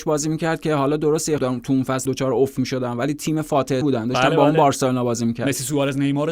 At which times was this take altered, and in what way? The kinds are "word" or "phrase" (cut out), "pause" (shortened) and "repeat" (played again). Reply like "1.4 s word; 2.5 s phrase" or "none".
1.4 s word; 2.1 s word; 3.8 s word